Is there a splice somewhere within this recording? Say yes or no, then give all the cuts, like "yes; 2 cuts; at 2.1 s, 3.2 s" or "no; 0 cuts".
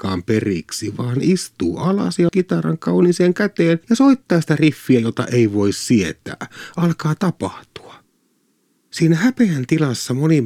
yes; 2 cuts; at 2.3 s, 3.8 s